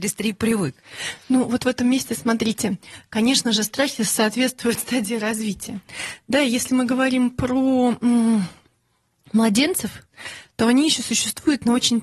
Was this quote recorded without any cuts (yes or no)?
yes